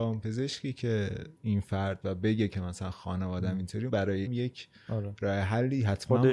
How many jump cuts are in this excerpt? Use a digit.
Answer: 4